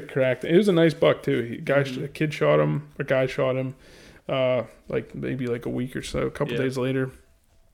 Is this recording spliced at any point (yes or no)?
no